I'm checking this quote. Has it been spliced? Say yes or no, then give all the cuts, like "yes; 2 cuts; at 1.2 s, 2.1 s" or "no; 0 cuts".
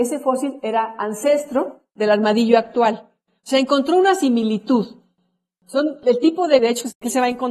no; 0 cuts